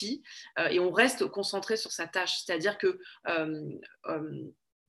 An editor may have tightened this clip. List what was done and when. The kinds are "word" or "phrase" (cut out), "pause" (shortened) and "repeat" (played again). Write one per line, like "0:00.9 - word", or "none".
none